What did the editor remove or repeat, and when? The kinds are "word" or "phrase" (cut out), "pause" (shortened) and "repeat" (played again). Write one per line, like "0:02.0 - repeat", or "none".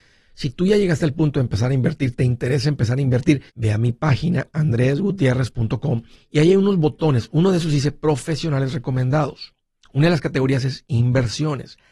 0:03.5 - pause
0:06.1 - pause